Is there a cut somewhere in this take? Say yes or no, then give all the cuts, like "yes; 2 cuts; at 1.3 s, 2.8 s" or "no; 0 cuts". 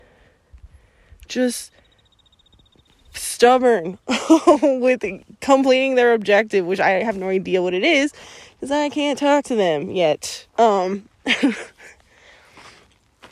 yes; 1 cut; at 10.5 s